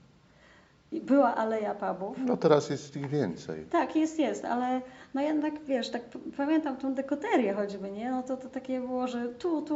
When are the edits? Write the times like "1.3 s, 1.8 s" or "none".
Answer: none